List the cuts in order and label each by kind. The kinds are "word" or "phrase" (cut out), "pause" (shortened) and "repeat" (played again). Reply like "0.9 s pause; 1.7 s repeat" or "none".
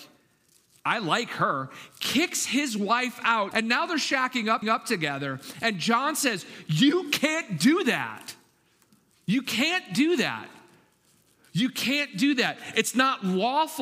3.5 s phrase; 4.6 s repeat

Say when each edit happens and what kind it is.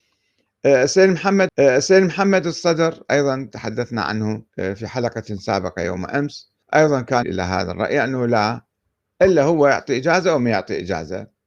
1.5 s repeat; 4.5 s pause; 6.6 s pause; 7.2 s word

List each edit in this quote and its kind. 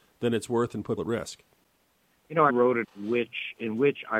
1.0 s word; 2.5 s word; 2.8 s word

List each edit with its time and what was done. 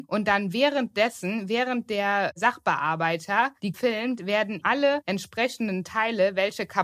3.7 s word; 4.6 s word

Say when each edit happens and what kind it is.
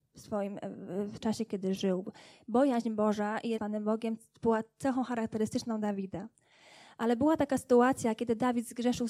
1.2 s word; 3.6 s phrase

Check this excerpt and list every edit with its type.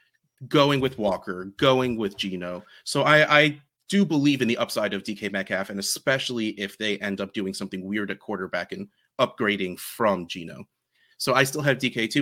none

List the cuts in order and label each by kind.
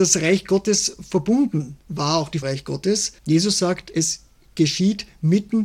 2.4 s phrase; 3.2 s pause

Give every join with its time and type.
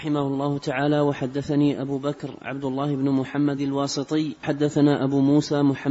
3.6 s phrase; 4.4 s word

